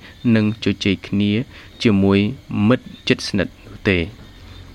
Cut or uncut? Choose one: cut